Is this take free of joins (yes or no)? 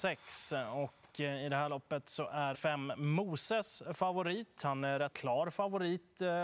no